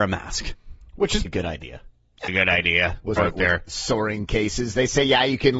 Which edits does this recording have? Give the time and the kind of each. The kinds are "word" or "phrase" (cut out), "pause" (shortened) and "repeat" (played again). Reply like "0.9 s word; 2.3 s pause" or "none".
1.2 s word; 2.3 s word; 3.2 s word